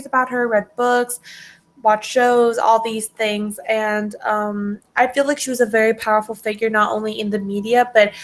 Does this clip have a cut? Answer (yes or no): no